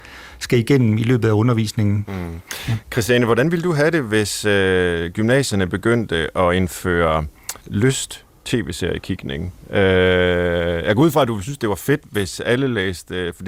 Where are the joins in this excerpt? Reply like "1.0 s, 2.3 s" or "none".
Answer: 7.6 s